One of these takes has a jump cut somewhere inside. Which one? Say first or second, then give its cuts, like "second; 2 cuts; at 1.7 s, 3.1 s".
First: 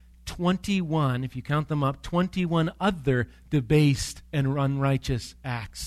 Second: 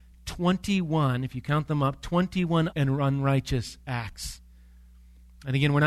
second; 1 cut; at 2.7 s